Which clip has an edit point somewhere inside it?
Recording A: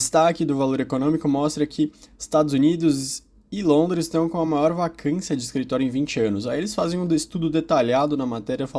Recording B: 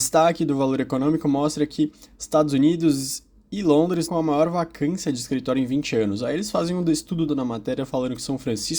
B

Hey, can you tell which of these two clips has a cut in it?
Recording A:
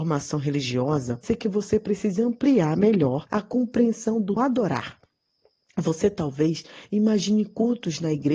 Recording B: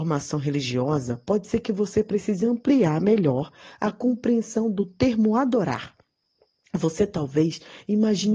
A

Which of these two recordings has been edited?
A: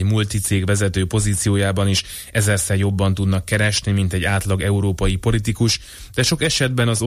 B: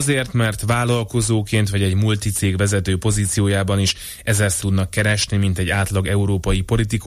B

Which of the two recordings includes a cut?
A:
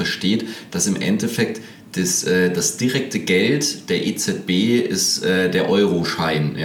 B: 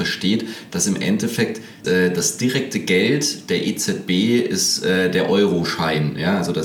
B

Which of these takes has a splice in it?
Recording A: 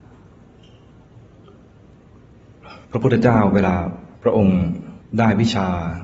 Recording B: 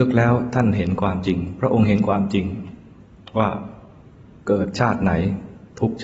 A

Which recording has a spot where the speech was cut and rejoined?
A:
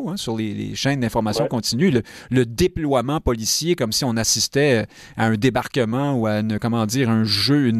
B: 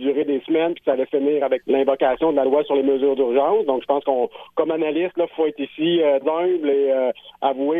B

